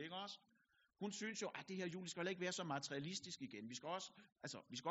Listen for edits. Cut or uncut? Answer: uncut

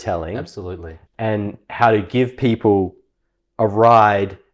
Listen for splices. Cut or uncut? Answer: cut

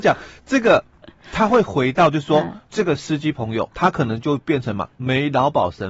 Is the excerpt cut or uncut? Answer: cut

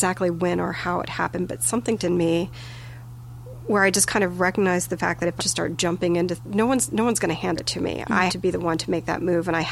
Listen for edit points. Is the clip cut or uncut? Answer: cut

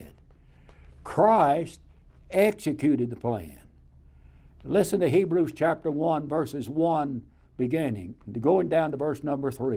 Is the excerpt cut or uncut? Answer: uncut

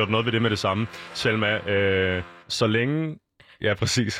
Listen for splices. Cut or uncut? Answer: cut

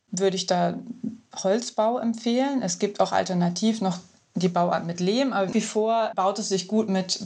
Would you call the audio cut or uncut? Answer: cut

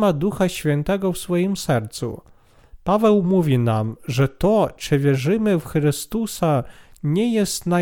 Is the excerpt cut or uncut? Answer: uncut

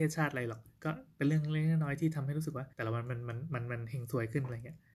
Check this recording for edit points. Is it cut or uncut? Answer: cut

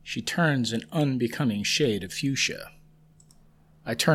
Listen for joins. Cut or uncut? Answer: uncut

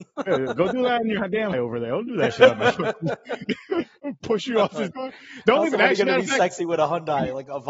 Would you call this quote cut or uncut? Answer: cut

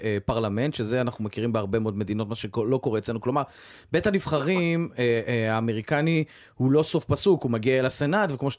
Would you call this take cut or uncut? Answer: uncut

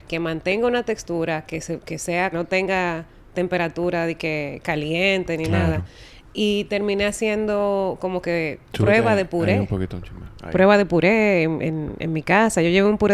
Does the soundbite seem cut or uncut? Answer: cut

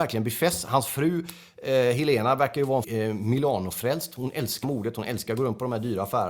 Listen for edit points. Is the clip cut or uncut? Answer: cut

